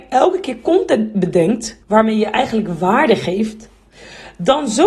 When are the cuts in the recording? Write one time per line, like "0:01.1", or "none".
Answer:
0:01.8

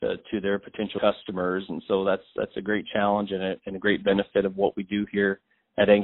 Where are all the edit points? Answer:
none

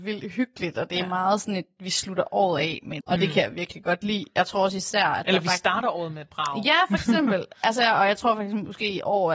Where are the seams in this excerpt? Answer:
0:03.0

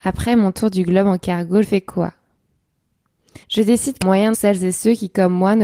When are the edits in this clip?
0:01.6
0:03.4
0:04.0
0:04.3

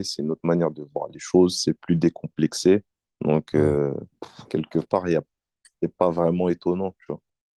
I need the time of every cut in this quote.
0:04.1

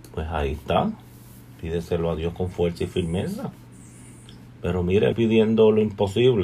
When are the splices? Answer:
0:05.1

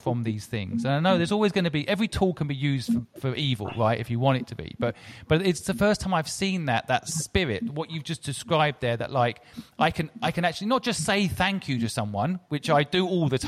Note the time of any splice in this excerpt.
none

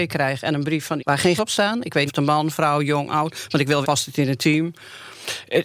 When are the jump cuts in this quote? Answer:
0:01.0
0:01.4
0:02.1
0:03.8

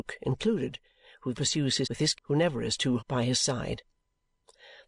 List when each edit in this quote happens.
0:01.3
0:01.8
0:02.1
0:03.0

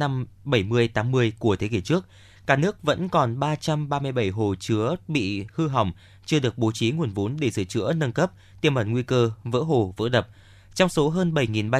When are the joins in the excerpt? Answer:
none

